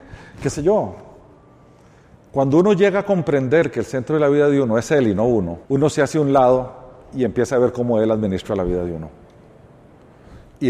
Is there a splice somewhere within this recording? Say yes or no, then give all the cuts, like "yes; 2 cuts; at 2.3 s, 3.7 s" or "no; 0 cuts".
yes; 1 cut; at 5.7 s